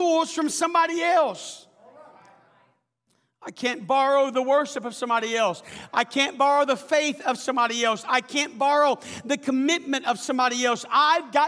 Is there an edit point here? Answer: no; 0 cuts

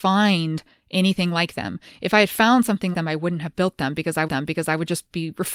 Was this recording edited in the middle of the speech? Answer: yes; 2 cuts; at 2.9 s, 4.3 s

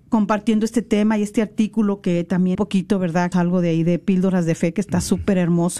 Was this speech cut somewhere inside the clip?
yes; 2 cuts; at 2.5 s, 3.3 s

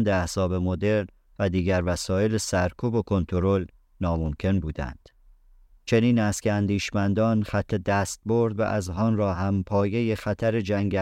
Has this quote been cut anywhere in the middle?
no; 0 cuts

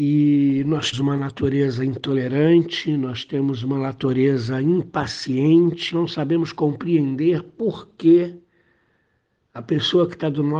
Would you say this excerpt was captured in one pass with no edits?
no; 2 cuts; at 0.9 s, 5.9 s

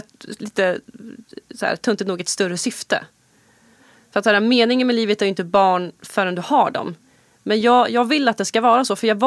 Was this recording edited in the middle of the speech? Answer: no; 0 cuts

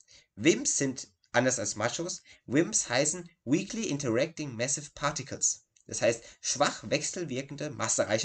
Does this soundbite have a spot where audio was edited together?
no; 0 cuts

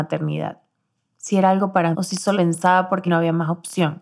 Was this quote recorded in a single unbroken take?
no; 3 cuts; at 1.9 s, 2.3 s, 3.1 s

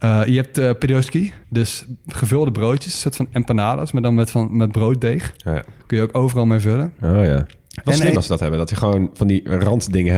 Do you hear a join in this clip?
yes; 1 cut; at 1.4 s

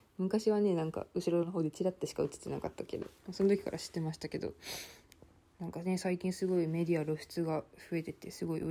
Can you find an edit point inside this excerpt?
no; 0 cuts

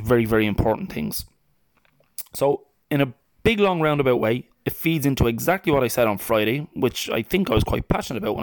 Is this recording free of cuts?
yes; 0 cuts

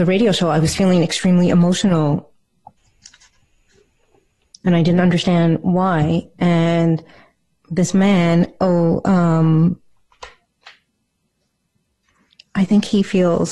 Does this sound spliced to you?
no; 0 cuts

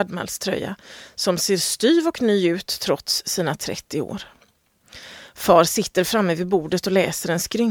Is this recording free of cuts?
yes; 0 cuts

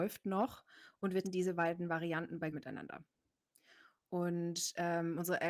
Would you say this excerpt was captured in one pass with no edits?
no; 2 cuts; at 1.2 s, 2.5 s

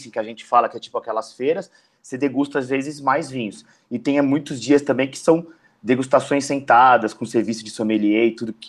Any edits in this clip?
no; 0 cuts

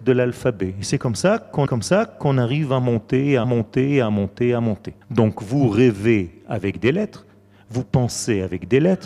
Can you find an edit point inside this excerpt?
yes; 3 cuts; at 1.7 s, 3.4 s, 5.0 s

